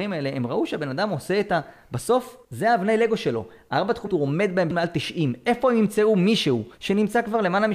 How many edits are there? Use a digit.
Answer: 4